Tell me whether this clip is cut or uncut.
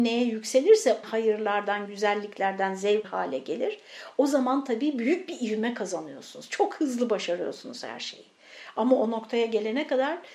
cut